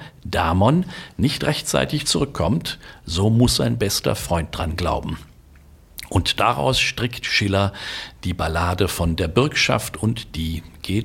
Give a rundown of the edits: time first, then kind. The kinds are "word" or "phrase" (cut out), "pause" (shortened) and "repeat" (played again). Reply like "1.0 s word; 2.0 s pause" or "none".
none

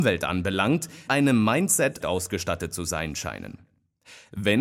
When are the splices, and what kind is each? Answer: 1.1 s word; 2.0 s phrase

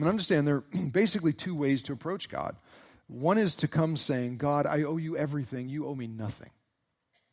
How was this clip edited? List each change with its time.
none

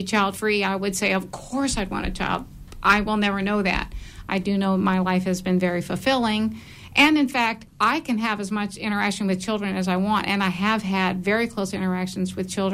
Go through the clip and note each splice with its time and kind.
7.7 s pause

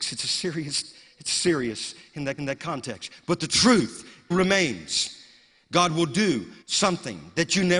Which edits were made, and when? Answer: 2.4 s repeat; 4.3 s word; 6.6 s pause

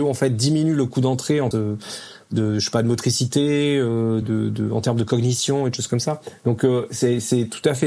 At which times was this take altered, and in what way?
1.5 s phrase; 4.2 s word

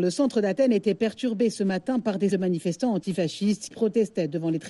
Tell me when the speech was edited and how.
2.3 s word; 3.7 s word

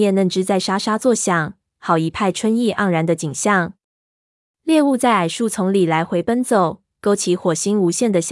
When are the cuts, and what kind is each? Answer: none

